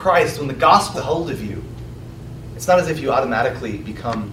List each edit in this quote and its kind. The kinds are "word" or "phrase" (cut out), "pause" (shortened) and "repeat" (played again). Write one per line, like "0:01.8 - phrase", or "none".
0:00.9 - word